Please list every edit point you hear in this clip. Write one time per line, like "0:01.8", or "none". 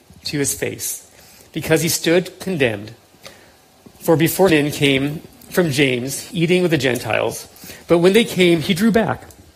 0:04.5
0:06.3